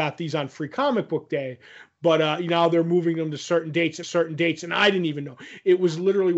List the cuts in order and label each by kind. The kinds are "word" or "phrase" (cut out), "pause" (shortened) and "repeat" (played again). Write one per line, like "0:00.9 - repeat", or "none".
0:04.0 - repeat